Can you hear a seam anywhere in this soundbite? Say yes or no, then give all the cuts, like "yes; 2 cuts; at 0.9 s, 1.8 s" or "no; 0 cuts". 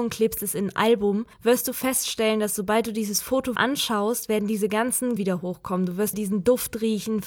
yes; 4 cuts; at 1.3 s, 3.6 s, 5.2 s, 6.1 s